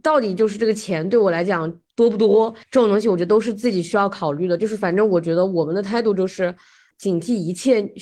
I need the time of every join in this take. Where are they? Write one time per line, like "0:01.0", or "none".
0:02.6
0:06.9

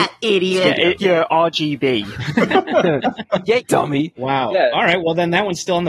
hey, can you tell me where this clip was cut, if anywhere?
0:01.0
0:03.6

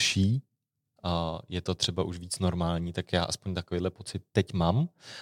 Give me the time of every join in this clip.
none

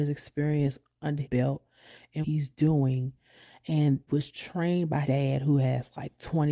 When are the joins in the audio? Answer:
0:01.2
0:02.2
0:04.1
0:05.0

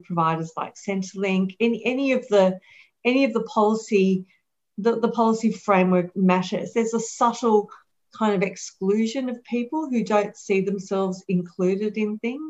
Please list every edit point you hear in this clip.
none

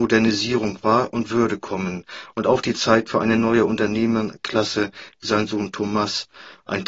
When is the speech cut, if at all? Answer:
0:05.2

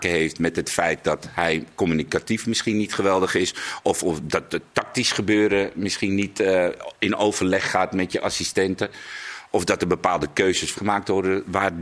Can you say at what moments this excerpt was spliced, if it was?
0:10.8

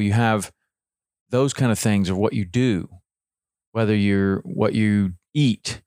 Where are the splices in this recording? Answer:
none

